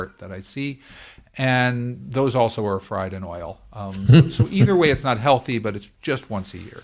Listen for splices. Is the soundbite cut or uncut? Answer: uncut